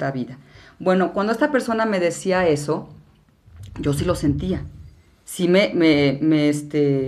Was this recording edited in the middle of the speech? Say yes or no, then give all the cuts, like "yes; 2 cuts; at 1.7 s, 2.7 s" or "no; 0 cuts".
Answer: no; 0 cuts